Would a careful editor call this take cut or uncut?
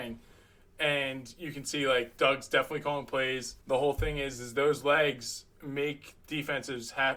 cut